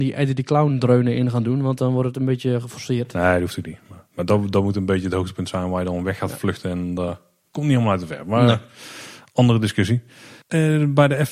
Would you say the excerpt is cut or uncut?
uncut